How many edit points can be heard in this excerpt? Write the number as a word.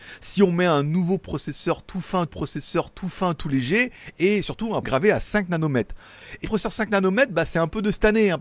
three